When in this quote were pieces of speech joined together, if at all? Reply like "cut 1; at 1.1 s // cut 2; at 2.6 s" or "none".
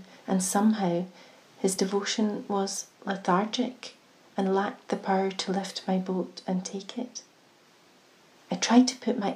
none